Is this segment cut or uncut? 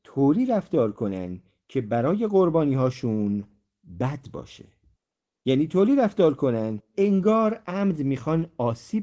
cut